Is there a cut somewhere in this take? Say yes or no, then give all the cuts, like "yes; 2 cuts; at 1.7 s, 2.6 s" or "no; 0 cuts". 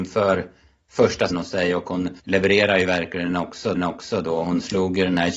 yes; 3 cuts; at 1.3 s, 2.2 s, 3.8 s